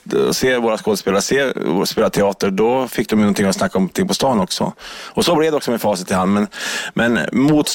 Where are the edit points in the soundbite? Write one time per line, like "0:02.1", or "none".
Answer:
none